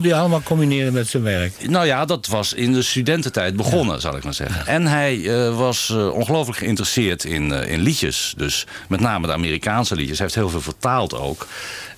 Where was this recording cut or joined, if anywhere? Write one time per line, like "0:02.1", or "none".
none